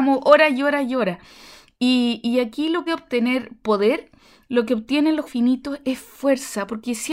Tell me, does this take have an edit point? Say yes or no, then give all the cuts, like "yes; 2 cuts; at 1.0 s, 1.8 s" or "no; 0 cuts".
yes; 2 cuts; at 2.9 s, 5.3 s